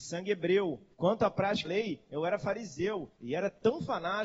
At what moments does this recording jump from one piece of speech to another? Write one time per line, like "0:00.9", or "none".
0:00.9
0:01.6
0:03.1